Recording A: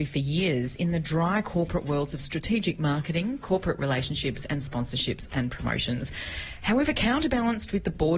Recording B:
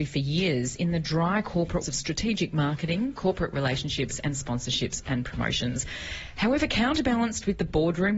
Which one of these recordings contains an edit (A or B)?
B